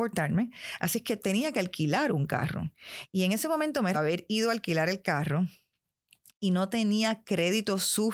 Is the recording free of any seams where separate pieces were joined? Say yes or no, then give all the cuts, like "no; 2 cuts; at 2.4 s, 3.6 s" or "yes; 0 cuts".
no; 1 cut; at 3.9 s